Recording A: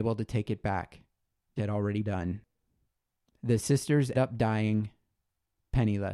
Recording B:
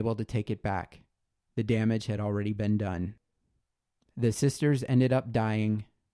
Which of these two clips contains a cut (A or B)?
A